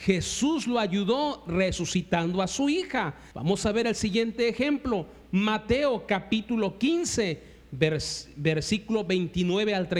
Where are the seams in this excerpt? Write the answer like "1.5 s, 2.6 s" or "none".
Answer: 3.3 s